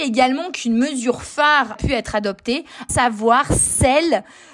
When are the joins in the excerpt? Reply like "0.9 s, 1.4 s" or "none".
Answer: 1.8 s, 2.9 s

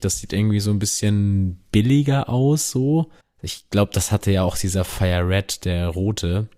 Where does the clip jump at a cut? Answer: 3.2 s

